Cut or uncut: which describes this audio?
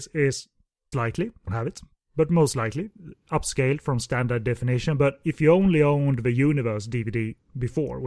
cut